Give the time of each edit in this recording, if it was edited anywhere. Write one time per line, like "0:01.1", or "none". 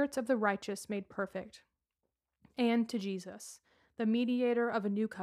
none